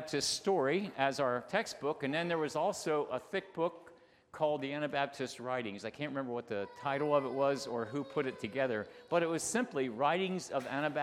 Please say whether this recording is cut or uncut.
uncut